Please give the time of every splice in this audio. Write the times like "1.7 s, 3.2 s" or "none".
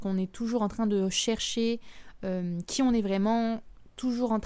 none